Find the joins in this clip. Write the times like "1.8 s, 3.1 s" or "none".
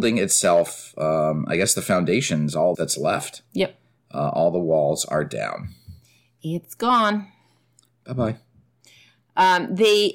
2.7 s